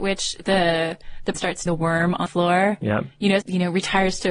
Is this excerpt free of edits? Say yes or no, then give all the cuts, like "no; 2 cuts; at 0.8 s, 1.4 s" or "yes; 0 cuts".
no; 4 cuts; at 1.3 s, 1.7 s, 2.3 s, 3.4 s